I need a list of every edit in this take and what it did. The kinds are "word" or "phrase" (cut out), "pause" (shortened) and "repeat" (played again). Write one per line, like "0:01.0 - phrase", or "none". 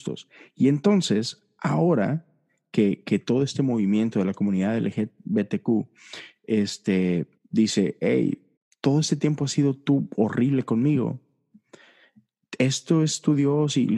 0:07.4 - pause
0:08.6 - pause